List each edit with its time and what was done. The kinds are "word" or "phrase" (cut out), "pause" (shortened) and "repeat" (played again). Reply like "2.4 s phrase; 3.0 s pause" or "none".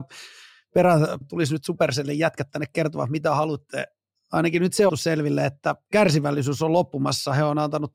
1.2 s word; 4.9 s phrase